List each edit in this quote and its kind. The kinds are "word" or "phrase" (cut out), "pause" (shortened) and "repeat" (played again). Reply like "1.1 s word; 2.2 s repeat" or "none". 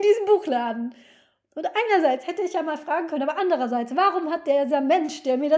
none